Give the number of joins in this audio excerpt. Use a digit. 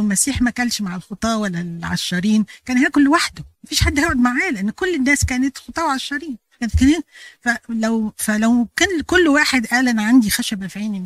1